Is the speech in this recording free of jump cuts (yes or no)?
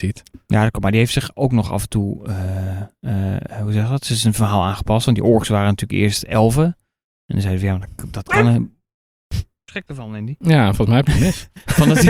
yes